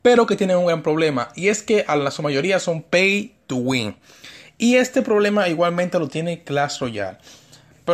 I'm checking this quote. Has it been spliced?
no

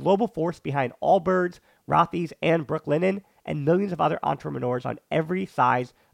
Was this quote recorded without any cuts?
yes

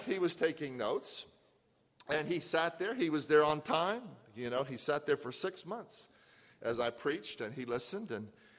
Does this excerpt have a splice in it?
no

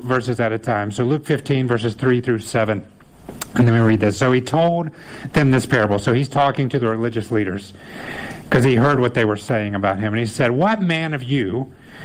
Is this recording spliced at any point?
no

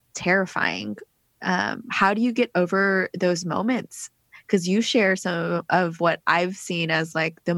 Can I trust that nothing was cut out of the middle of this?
yes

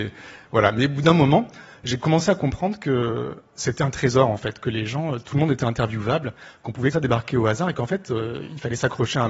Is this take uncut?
no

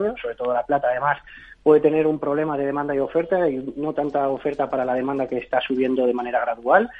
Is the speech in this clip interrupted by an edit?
no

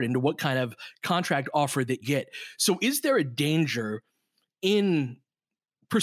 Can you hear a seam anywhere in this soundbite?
yes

